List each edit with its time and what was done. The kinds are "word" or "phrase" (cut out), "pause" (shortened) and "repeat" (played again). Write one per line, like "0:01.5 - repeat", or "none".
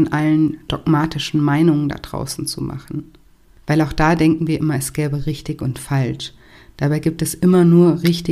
none